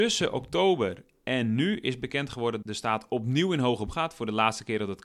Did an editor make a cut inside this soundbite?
yes; 2 cuts; at 2.6 s, 3.9 s

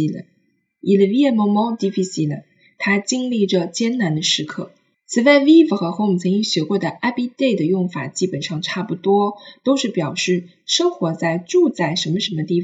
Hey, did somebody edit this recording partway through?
no; 0 cuts

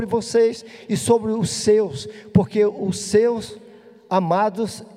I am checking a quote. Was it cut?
no; 0 cuts

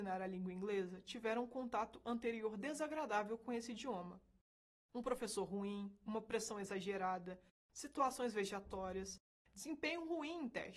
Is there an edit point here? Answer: no; 0 cuts

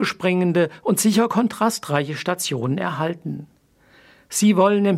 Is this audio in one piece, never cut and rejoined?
yes; 0 cuts

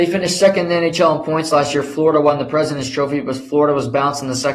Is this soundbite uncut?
yes; 0 cuts

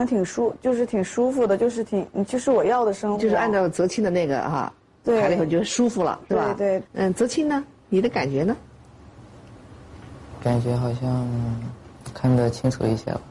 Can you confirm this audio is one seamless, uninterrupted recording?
no; 2 cuts; at 6.9 s, 7.8 s

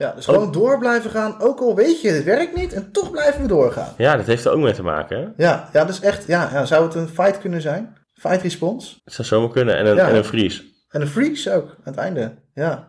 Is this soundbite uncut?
no; 2 cuts; at 8.0 s, 9.0 s

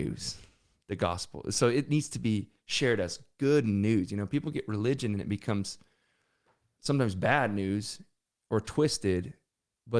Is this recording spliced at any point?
no; 0 cuts

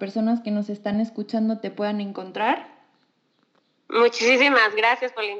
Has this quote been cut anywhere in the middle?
no; 0 cuts

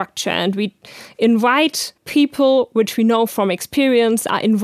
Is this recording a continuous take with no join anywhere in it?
no; 1 cut; at 2.0 s

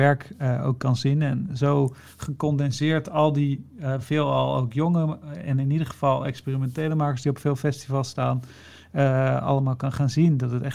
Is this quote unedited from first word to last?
yes; 0 cuts

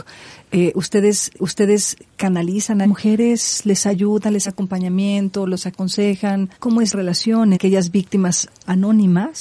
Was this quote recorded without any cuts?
no; 6 cuts; at 1.4 s, 2.8 s, 4.4 s, 6.5 s, 6.9 s, 7.5 s

